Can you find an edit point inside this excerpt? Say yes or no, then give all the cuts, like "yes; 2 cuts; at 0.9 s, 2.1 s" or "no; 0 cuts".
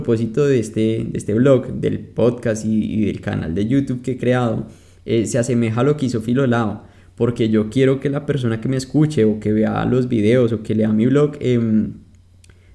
no; 0 cuts